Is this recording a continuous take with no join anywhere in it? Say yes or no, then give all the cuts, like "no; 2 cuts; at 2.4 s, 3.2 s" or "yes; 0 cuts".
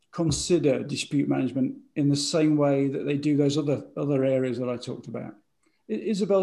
yes; 0 cuts